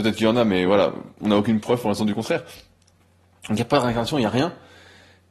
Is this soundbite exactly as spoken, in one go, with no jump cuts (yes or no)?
yes